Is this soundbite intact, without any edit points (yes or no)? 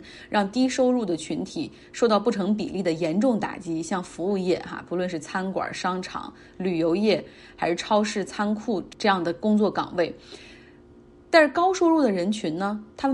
yes